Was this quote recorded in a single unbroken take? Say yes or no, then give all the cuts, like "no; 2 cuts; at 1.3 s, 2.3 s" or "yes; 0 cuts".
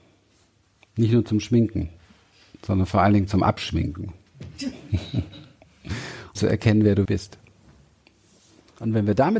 no; 2 cuts; at 6.3 s, 7.0 s